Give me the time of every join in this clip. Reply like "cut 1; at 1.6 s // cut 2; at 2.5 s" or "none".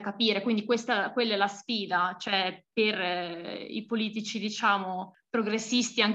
none